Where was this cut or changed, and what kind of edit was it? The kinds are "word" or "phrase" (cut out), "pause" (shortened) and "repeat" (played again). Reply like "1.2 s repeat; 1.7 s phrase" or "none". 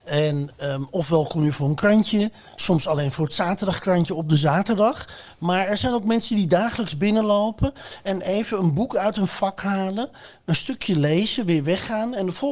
none